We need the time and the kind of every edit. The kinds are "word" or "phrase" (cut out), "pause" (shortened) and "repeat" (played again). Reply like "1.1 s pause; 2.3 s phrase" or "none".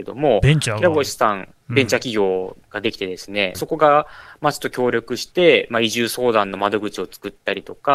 3.5 s phrase